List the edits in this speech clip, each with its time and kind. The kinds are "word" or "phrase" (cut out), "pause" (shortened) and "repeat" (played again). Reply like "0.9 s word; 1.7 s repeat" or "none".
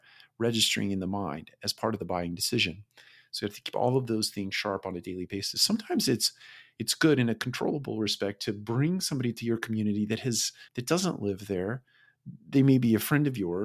10.7 s pause